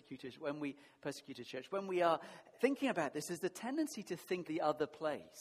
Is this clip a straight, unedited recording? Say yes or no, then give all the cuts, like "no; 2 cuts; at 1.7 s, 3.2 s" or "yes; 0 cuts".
no; 2 cuts; at 2.6 s, 4.5 s